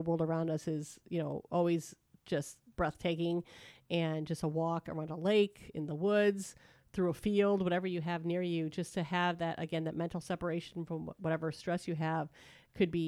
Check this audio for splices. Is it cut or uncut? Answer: uncut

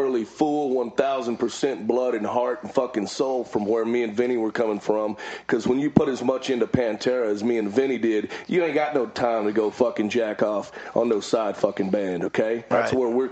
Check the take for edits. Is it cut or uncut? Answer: uncut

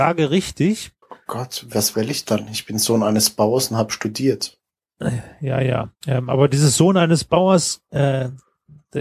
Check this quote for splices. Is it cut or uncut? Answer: cut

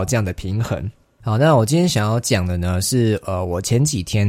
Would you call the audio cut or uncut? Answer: uncut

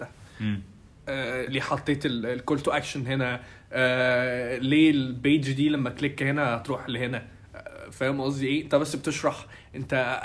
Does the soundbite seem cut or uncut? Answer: cut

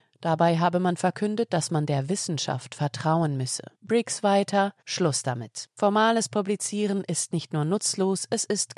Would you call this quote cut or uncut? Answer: cut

